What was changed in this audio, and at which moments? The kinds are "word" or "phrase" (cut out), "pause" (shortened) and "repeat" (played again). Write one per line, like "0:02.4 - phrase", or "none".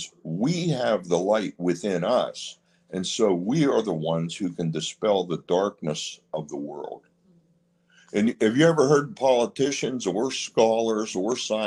none